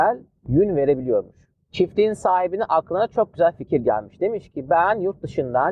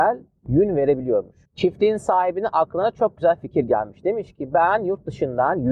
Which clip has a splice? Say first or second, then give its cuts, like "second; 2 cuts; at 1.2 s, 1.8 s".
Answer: second; 1 cut; at 1.4 s